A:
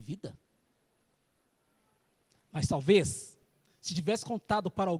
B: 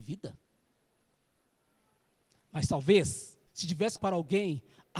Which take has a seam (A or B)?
B